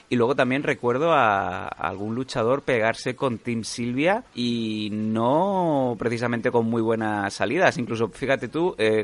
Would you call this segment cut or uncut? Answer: cut